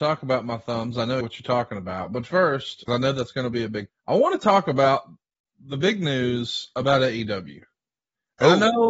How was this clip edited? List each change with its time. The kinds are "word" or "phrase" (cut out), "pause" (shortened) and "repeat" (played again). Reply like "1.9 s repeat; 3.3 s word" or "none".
1.2 s word; 2.9 s word; 3.9 s word